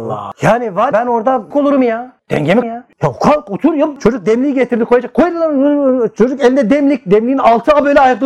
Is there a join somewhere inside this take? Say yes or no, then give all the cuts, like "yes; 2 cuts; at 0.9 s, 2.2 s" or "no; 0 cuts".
yes; 3 cuts; at 0.9 s, 1.5 s, 2.6 s